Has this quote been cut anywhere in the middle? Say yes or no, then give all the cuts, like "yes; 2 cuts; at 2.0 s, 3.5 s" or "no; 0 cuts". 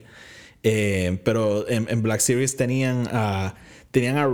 no; 0 cuts